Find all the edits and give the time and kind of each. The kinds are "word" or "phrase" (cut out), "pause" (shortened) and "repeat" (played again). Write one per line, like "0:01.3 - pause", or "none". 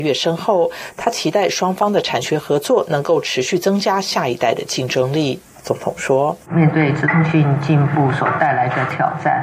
0:06.4 - pause